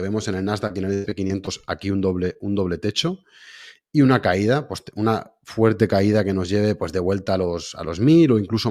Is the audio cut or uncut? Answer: uncut